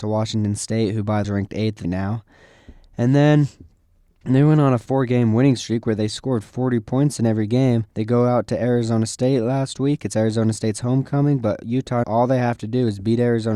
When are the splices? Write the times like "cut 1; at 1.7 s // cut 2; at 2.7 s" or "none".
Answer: cut 1; at 1.2 s // cut 2; at 1.8 s // cut 3; at 7.9 s // cut 4; at 12.0 s

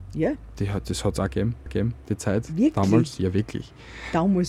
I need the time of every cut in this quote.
cut 1; at 1.7 s

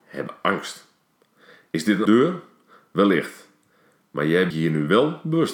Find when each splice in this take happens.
cut 1; at 2.1 s // cut 2; at 4.5 s

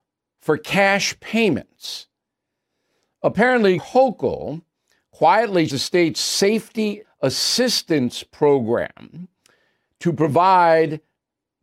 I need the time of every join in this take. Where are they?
cut 1; at 3.8 s // cut 2; at 5.7 s // cut 3; at 7.0 s

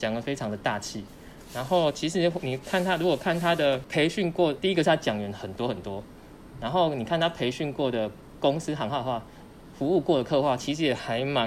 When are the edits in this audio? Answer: cut 1; at 4.6 s

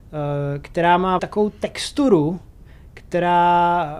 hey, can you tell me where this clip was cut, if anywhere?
cut 1; at 1.2 s

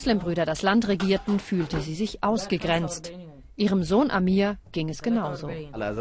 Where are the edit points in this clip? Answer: none

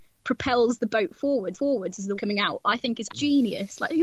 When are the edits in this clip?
cut 1; at 1.5 s // cut 2; at 2.2 s // cut 3; at 3.1 s

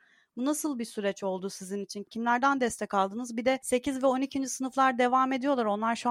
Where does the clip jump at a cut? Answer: none

